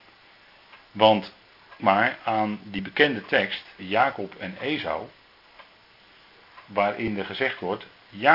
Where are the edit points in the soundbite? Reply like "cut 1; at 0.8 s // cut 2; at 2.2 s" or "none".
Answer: cut 1; at 1.8 s // cut 2; at 3.8 s